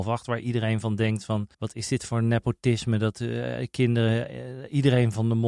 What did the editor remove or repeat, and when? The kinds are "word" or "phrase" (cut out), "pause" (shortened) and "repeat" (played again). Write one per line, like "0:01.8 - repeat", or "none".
0:01.5 - pause